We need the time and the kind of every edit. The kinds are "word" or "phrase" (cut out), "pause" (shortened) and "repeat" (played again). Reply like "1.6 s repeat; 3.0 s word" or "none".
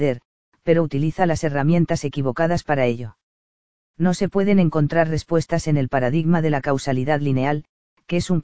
none